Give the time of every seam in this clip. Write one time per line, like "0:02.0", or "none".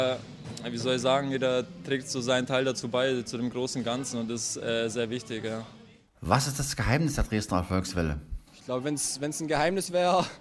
0:08.5